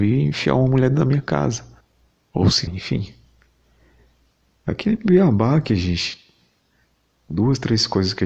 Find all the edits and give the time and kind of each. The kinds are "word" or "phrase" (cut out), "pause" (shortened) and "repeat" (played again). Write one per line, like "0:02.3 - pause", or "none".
0:01.8 - pause
0:02.7 - word